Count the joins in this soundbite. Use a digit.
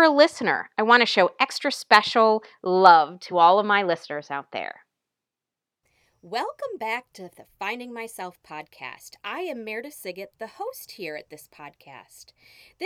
0